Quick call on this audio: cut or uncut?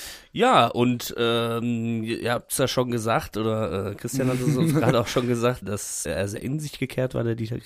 cut